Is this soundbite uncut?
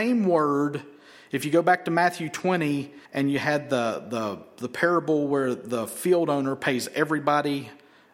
no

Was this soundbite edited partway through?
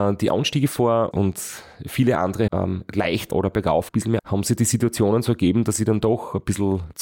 yes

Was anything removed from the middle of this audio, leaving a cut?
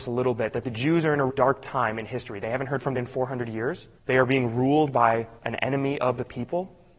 yes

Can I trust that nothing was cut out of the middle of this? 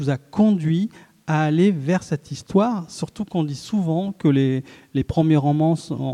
yes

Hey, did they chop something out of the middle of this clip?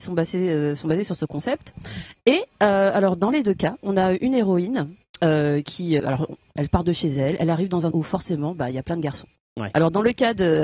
yes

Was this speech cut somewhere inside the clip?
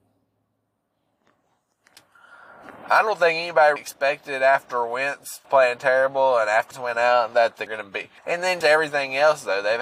yes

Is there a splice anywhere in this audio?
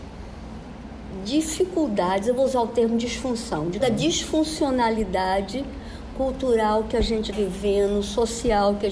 yes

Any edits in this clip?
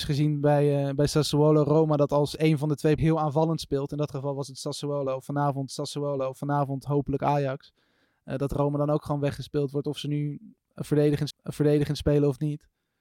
yes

